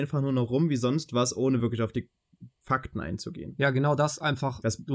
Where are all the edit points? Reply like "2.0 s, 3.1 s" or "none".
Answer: none